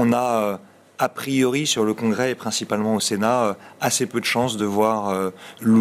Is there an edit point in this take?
no; 0 cuts

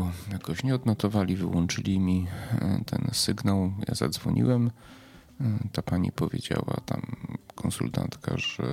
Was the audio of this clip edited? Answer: no; 0 cuts

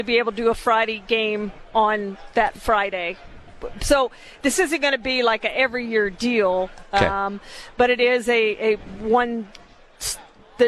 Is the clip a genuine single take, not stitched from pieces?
yes; 0 cuts

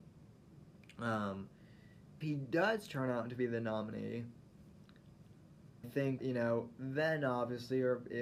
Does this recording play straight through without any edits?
no; 3 cuts; at 2.2 s, 5.8 s, 6.2 s

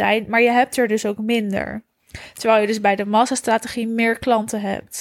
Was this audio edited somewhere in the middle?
no; 0 cuts

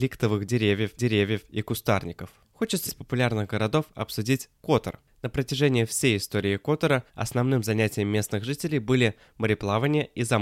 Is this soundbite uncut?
no; 3 cuts; at 1.0 s, 2.9 s, 7.1 s

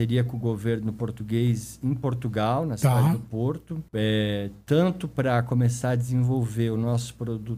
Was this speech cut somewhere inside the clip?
yes; 1 cut; at 3.9 s

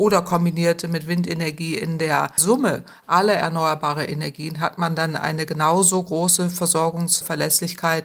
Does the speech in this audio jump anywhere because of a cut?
no; 0 cuts

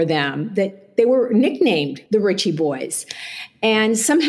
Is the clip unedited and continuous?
no; 1 cut; at 2.1 s

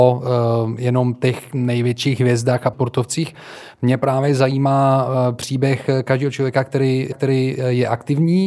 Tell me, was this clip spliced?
yes; 2 cuts; at 2.7 s, 7.1 s

